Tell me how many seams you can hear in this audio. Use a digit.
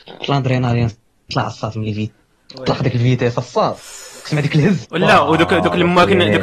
1